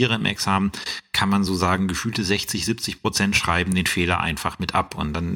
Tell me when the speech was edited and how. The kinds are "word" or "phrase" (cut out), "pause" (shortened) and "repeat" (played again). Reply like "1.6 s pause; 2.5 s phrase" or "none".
none